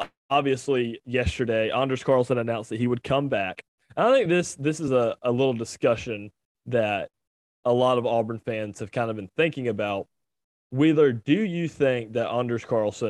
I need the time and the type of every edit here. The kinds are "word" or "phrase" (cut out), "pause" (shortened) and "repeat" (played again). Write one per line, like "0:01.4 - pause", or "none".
none